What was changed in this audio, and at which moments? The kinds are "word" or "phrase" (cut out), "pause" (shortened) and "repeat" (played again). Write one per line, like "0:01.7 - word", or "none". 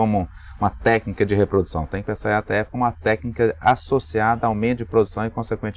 none